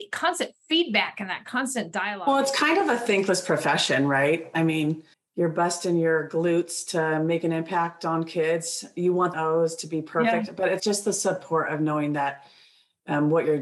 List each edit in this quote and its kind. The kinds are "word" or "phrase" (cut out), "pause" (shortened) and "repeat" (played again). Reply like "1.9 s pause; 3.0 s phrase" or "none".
5.1 s pause; 9.3 s phrase; 10.8 s word

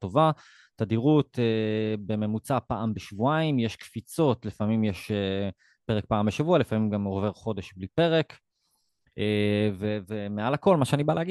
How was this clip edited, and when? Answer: none

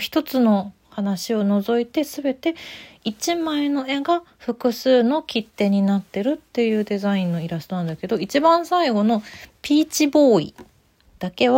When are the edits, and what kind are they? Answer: none

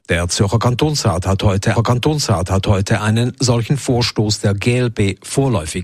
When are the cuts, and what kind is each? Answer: 1.8 s repeat

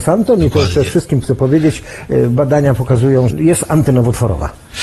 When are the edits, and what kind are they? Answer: 1.2 s word; 3.3 s word

